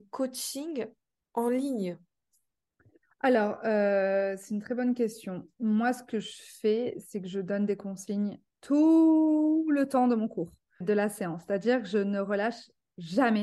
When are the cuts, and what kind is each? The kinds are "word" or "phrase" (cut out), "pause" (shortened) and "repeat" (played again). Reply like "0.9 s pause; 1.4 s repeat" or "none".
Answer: 5.5 s pause; 10.8 s word

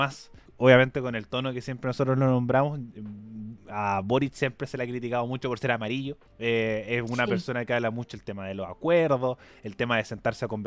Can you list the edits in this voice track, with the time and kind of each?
none

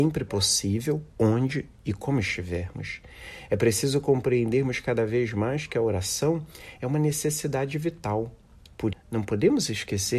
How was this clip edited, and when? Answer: 8.9 s word

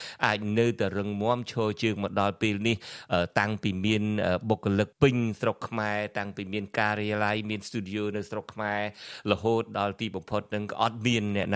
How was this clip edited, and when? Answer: 4.9 s pause

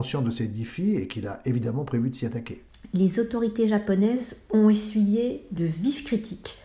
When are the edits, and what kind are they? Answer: none

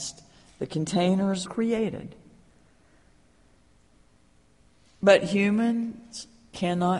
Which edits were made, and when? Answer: 1.4 s word

